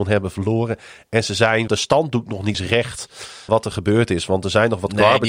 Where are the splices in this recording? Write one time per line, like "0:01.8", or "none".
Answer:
0:01.7
0:02.5
0:03.5